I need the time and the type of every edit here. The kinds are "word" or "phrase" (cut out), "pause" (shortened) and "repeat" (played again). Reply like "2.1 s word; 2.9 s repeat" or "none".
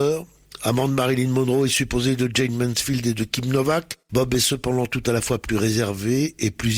4.0 s pause